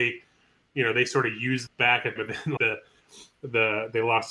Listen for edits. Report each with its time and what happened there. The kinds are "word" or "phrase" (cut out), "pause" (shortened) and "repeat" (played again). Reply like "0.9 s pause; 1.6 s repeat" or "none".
1.7 s phrase; 2.2 s word; 2.6 s word